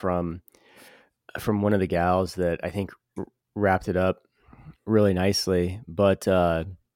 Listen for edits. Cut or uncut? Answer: uncut